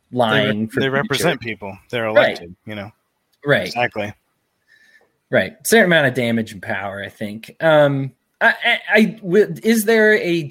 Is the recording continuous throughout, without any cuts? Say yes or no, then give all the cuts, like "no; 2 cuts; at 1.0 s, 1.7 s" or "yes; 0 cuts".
yes; 0 cuts